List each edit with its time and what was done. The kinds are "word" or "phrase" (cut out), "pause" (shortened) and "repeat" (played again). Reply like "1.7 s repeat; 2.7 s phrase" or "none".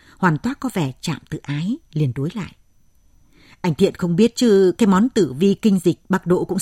none

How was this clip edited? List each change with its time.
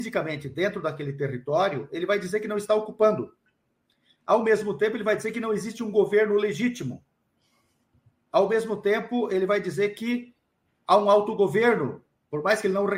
none

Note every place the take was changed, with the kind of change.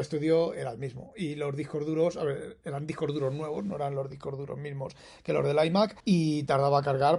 6.0 s pause

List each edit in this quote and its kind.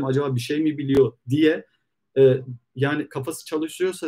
none

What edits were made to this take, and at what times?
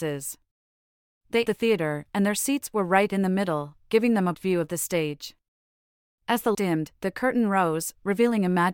1.4 s word; 4.3 s word; 6.5 s word

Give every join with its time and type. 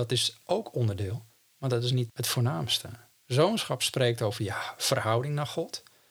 none

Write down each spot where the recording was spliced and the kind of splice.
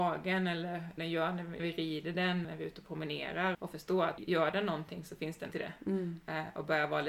1.0 s word; 1.6 s word; 2.4 s word; 3.5 s word; 4.2 s word; 5.5 s word

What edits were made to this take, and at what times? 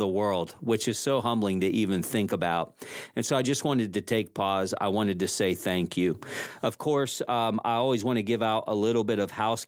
none

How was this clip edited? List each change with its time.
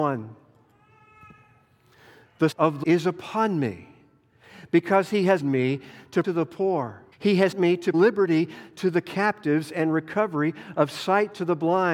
2.5 s word; 2.8 s word; 5.4 s word; 6.2 s phrase; 7.1 s pause; 7.5 s word; 7.9 s word

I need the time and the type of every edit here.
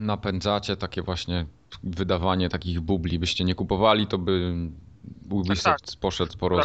none

